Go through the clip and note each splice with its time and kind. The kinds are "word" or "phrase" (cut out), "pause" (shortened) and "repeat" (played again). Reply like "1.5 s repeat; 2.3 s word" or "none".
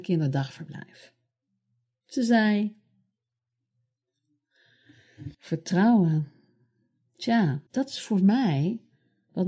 5.3 s pause; 7.7 s pause